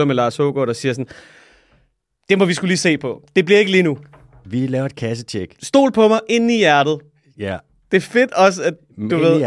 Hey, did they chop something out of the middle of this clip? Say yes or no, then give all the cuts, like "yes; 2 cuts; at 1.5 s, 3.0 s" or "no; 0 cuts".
no; 0 cuts